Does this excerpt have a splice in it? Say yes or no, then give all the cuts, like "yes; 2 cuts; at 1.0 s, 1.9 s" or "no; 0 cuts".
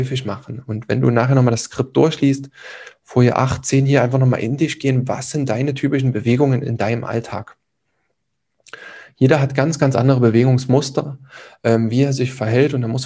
no; 0 cuts